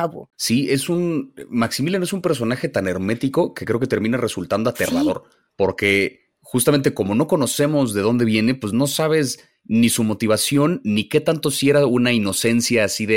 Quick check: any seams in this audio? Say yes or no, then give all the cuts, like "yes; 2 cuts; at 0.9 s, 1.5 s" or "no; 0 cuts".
yes; 1 cut; at 5.5 s